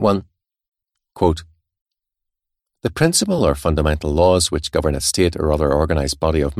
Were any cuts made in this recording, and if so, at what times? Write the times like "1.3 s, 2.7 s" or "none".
none